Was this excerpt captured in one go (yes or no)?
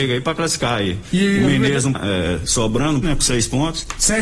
no